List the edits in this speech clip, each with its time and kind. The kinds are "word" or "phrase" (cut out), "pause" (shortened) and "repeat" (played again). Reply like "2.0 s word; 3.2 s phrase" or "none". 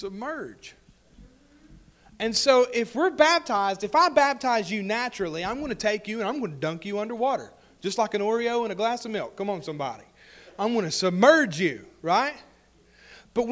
none